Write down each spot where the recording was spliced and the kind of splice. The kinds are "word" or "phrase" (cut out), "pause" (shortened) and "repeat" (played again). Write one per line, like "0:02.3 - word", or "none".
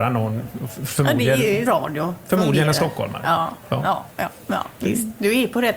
0:01.7 - word